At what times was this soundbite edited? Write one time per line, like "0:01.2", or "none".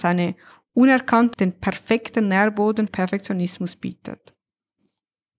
0:01.3
0:02.9